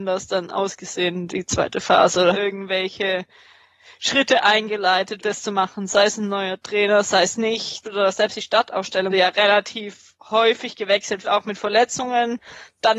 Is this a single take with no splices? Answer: no; 6 cuts; at 2.3 s, 5.2 s, 7.8 s, 9.1 s, 10.2 s, 11.2 s

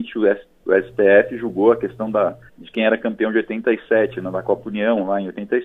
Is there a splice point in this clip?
yes; 1 cut; at 2.5 s

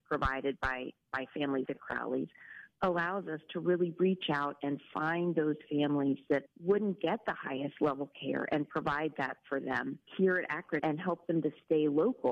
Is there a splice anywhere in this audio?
yes; 4 cuts; at 1.7 s, 6.5 s, 10.1 s, 10.8 s

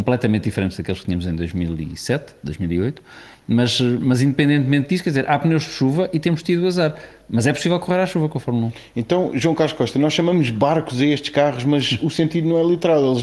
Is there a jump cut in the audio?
no; 0 cuts

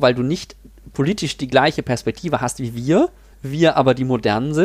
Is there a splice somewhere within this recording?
yes; 1 cut; at 3.3 s

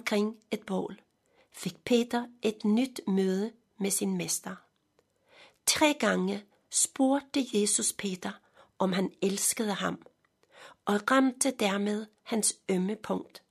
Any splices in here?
no; 0 cuts

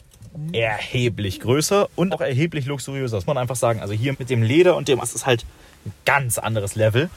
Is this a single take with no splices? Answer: no; 4 cuts; at 2.1 s, 3.3 s, 4.1 s, 5.0 s

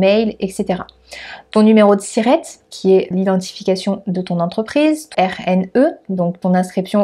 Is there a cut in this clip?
yes; 2 cuts; at 3.1 s, 5.1 s

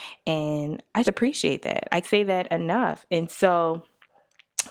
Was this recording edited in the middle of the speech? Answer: yes; 2 cuts; at 1.0 s, 2.0 s

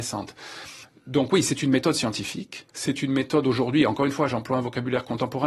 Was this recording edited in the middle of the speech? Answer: yes; 1 cut; at 2.7 s

